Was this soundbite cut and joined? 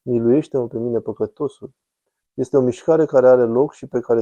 no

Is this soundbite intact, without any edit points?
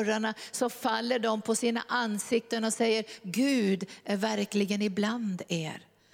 yes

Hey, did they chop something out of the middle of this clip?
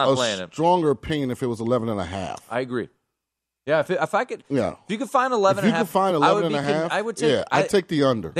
no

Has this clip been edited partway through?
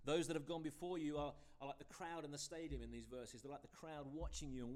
no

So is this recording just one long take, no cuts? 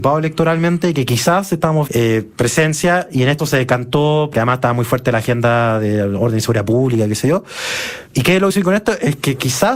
no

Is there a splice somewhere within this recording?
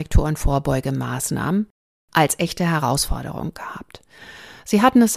no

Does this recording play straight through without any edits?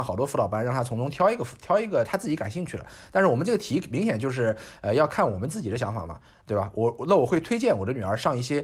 yes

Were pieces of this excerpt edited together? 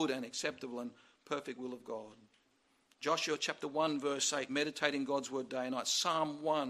no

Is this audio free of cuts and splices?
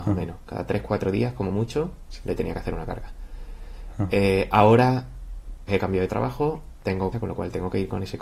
no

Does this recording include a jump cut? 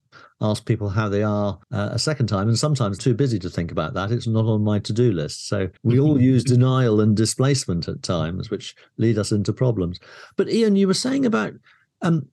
yes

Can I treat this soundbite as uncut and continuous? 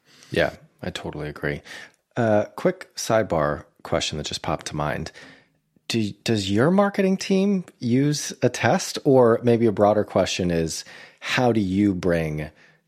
yes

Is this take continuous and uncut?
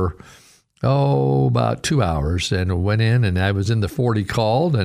no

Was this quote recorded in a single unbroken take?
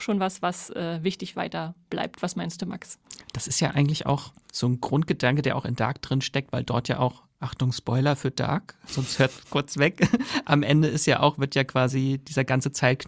no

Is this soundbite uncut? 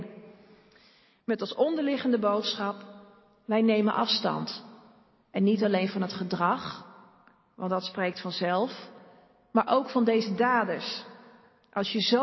yes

